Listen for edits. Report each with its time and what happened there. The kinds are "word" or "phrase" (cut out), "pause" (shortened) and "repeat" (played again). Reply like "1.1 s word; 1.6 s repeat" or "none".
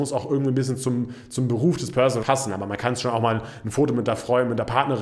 2.2 s word

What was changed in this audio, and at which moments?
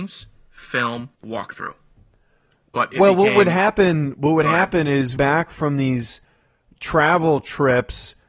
1.1 s pause; 5.2 s phrase

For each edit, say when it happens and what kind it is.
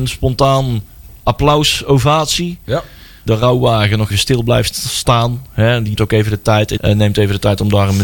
3.3 s word; 4.1 s word; 6.0 s word; 6.8 s word

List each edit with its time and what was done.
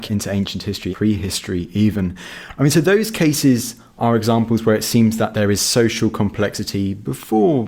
0.9 s word

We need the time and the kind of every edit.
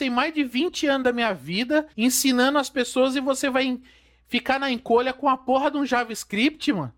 1.9 s pause

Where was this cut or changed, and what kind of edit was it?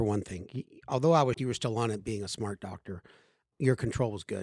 1.3 s word; 3.5 s word

